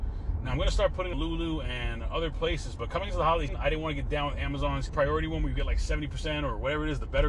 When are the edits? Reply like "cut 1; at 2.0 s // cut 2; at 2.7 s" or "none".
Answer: cut 1; at 1.1 s // cut 2; at 3.5 s // cut 3; at 4.9 s